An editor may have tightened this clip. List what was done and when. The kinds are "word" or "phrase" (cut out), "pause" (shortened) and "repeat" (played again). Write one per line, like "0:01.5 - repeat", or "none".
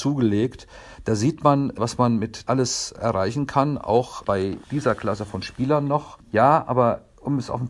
0:02.5 - word

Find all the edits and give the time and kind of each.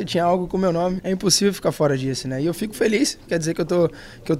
0:01.0 - word
0:03.3 - word

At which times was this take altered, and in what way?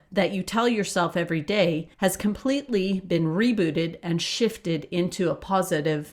0:01.9 - pause

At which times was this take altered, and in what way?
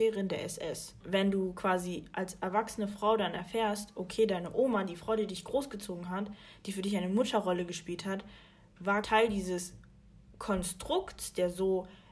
none

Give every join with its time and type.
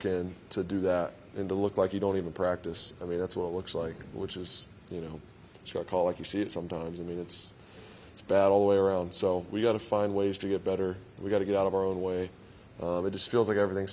none

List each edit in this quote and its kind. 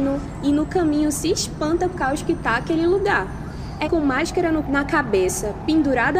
0:01.9 - word
0:03.8 - word
0:04.6 - word

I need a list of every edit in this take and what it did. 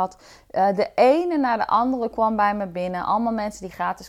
0:02.1 - word

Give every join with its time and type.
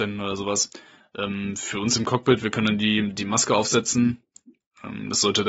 none

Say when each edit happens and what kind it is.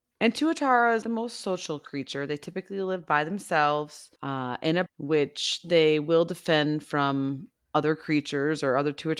0:01.0 - phrase
0:04.2 - pause
0:04.9 - word

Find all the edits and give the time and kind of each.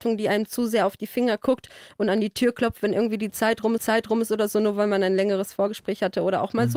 0:03.8 - repeat

